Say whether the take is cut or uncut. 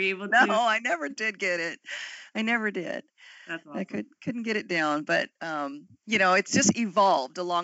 uncut